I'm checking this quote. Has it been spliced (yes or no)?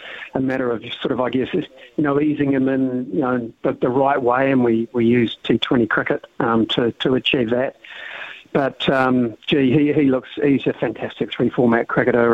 no